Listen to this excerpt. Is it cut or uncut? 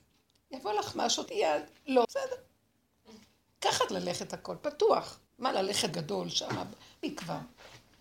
cut